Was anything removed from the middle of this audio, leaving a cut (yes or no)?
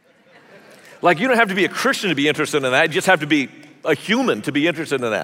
no